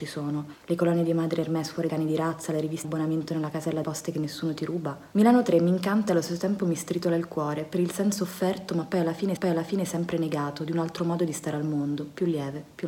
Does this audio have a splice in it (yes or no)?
yes